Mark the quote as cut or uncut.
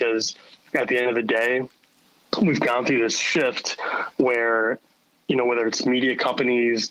uncut